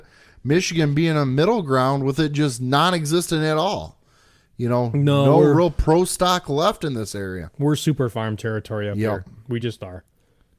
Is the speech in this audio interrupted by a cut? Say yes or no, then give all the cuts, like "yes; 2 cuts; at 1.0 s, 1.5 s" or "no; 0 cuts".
no; 0 cuts